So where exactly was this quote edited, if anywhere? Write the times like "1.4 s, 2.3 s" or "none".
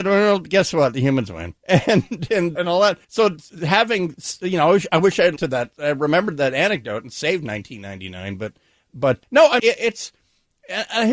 1.6 s, 2.6 s, 3.0 s, 5.4 s, 9.2 s, 9.6 s

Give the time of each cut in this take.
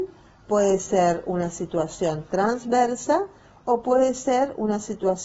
none

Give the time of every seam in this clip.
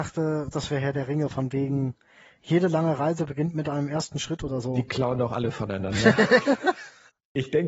none

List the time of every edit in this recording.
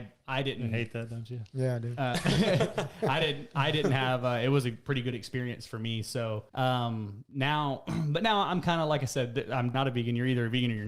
6.5 s, 9.7 s

